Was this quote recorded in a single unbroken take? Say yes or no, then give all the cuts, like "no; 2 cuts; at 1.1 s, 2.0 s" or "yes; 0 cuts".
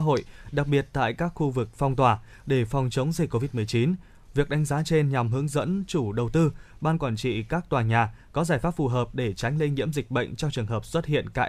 yes; 0 cuts